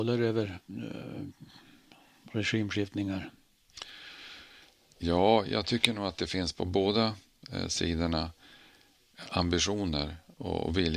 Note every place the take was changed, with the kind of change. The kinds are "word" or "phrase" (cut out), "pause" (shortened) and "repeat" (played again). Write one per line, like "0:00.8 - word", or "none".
none